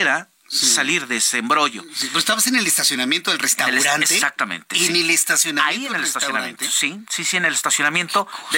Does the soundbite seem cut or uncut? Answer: uncut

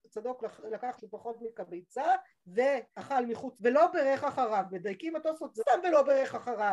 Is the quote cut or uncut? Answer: cut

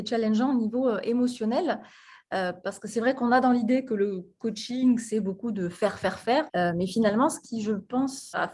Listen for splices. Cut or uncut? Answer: uncut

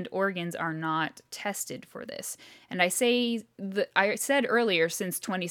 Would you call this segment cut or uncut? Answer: uncut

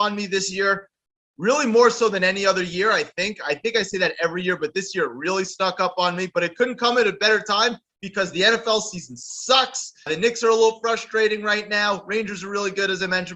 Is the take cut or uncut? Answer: uncut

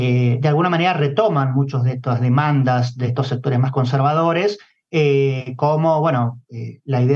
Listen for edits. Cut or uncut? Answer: uncut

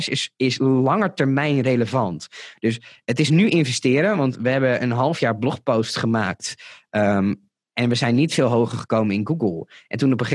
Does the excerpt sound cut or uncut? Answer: uncut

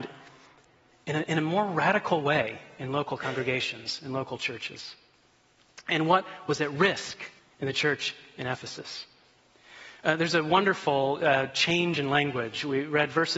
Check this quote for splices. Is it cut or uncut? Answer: cut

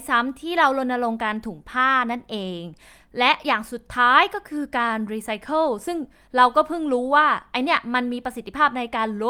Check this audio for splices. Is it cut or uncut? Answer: uncut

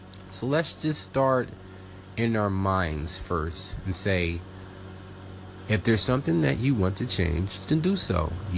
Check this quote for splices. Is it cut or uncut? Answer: uncut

